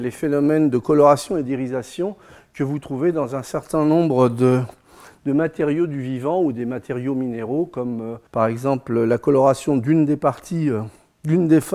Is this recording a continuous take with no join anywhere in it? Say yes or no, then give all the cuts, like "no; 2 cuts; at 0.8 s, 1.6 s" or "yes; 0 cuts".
no; 1 cut; at 8.3 s